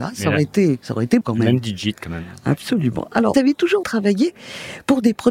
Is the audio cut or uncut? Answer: cut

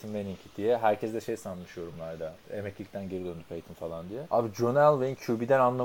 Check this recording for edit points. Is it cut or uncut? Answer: cut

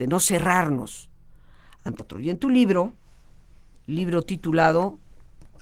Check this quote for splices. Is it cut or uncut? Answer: cut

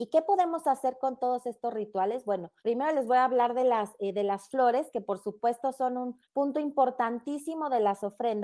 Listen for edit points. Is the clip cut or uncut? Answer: cut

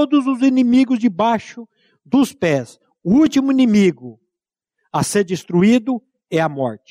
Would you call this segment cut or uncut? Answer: uncut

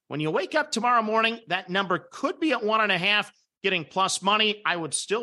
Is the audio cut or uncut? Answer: uncut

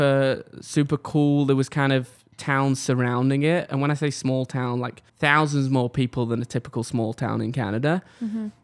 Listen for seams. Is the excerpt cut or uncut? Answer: cut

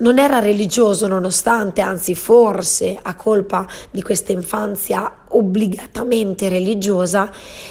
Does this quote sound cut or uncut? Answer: uncut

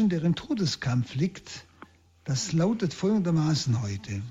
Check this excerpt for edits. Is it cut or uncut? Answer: uncut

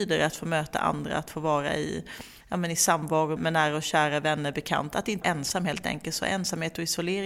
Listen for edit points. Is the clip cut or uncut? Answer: cut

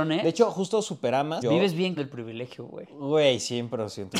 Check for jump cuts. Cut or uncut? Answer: cut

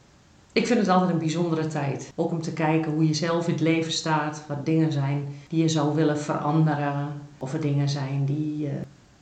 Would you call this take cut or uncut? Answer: uncut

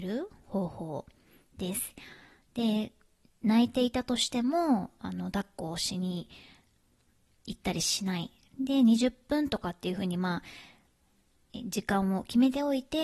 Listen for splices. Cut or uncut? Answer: uncut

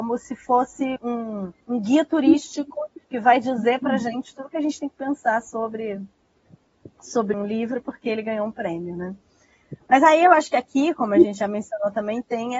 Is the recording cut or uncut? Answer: cut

